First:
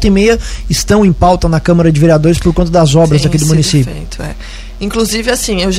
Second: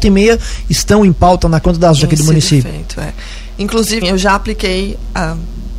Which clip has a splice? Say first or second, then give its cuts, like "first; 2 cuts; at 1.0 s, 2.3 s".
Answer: second; 3 cuts; at 1.6 s, 2.0 s, 4.0 s